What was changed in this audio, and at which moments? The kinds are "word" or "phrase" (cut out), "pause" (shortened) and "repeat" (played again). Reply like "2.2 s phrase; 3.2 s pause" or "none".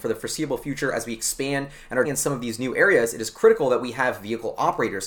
2.0 s word